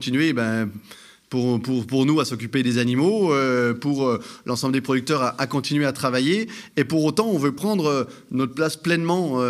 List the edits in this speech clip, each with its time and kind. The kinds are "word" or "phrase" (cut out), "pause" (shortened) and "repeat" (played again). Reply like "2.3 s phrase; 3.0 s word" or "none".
none